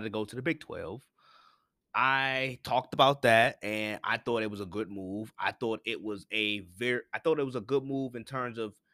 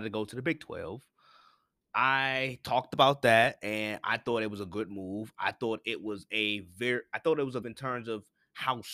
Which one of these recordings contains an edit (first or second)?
second